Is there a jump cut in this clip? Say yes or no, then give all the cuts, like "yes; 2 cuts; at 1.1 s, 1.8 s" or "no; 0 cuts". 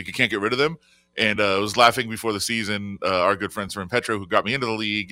no; 0 cuts